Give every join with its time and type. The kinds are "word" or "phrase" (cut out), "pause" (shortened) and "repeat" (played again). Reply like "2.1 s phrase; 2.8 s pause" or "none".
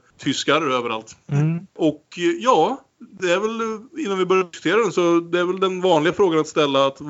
2.9 s pause